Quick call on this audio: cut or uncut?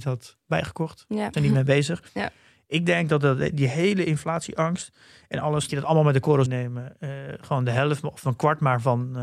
cut